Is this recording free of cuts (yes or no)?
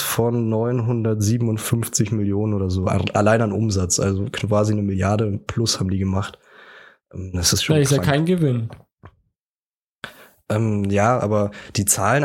yes